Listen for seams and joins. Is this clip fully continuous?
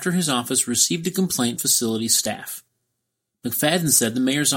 no; 1 cut; at 1.6 s

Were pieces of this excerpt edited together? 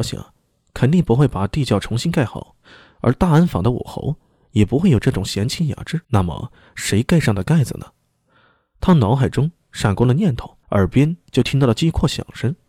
yes; 2 cuts; at 6.0 s, 10.6 s

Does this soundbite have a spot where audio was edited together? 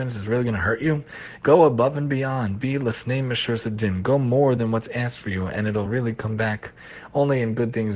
no; 0 cuts

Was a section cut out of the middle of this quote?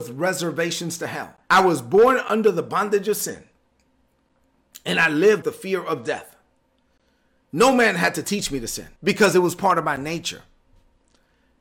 yes; 3 cuts; at 1.4 s, 5.4 s, 9.0 s

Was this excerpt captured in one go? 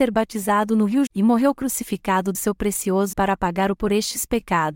no; 4 cuts; at 1.1 s, 2.3 s, 3.1 s, 3.8 s

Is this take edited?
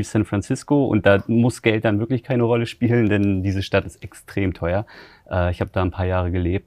no; 0 cuts

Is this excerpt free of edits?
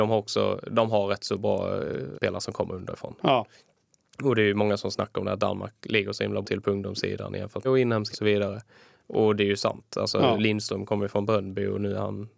no; 4 cuts; at 2.1 s, 6.4 s, 7.6 s, 8.1 s

